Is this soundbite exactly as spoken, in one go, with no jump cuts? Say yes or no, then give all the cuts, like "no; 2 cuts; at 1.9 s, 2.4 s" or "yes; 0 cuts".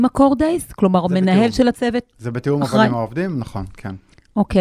yes; 0 cuts